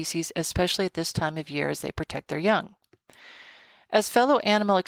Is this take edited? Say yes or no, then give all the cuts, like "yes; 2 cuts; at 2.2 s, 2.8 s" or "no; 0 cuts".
no; 0 cuts